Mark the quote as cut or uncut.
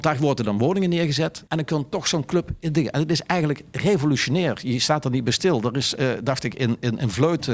cut